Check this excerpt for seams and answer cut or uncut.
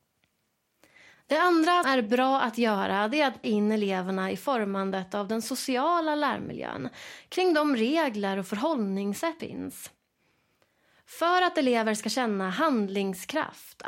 cut